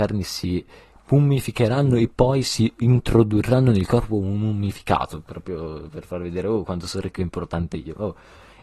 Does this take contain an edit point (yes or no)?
no